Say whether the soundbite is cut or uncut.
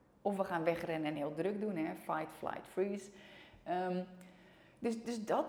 uncut